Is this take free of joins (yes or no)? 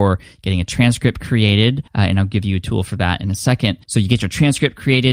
no